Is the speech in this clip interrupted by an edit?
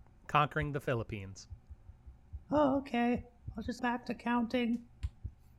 yes; 1 cut; at 3.8 s

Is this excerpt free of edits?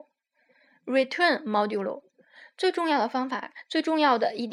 yes; 0 cuts

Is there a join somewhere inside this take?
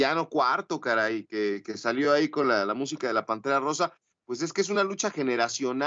no; 0 cuts

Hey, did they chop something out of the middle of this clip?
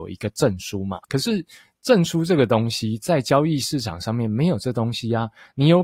yes; 1 cut; at 1.0 s

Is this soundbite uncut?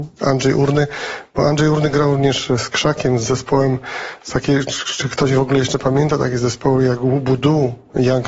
yes; 0 cuts

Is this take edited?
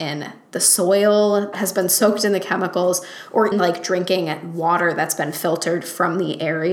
yes; 2 cuts; at 1.5 s, 3.5 s

